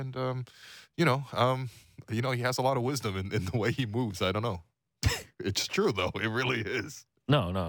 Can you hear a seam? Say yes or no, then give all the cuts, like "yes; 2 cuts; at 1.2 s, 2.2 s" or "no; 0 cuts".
no; 0 cuts